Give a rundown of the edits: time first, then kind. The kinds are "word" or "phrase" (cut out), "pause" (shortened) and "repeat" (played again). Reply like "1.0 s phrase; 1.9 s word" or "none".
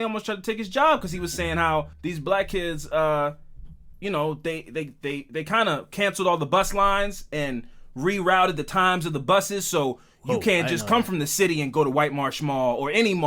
1.9 s pause